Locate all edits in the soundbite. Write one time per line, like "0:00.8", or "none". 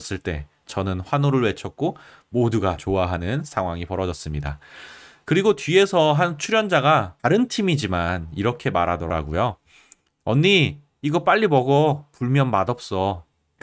0:02.8
0:07.2